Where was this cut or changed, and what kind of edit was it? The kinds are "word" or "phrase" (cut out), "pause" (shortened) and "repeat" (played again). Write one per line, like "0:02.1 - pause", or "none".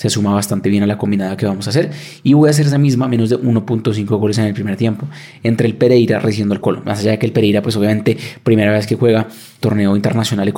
0:06.6 - word